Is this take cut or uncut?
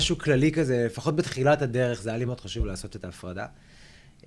cut